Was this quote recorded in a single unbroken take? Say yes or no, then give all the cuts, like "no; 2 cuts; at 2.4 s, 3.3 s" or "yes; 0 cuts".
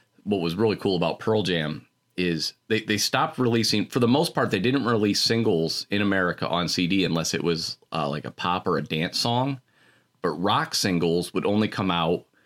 yes; 0 cuts